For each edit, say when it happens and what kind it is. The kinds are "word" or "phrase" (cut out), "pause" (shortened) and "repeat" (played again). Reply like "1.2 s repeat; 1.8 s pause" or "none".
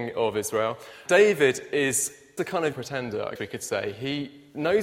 1.1 s word; 2.4 s word; 2.7 s word; 3.4 s word